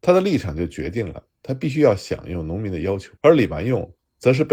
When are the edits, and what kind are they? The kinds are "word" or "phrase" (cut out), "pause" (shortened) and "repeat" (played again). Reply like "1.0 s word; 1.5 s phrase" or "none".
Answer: 3.2 s pause